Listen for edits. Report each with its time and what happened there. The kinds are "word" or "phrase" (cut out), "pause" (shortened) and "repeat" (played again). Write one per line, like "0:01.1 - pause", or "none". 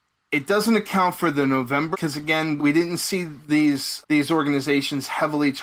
0:01.9 - word
0:02.6 - word
0:04.0 - word